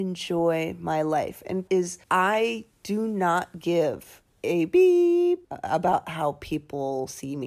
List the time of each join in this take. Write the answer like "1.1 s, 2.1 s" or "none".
1.7 s, 2.0 s, 4.3 s, 5.4 s